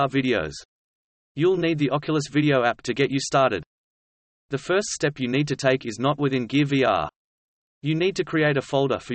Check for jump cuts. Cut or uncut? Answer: uncut